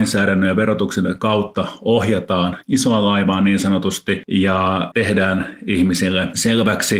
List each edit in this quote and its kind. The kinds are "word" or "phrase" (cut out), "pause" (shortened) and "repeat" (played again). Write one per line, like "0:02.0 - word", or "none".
0:02.6 - word